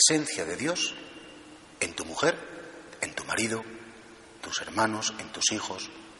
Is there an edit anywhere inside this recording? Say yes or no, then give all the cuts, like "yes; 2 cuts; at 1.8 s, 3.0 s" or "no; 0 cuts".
yes; 1 cut; at 4.4 s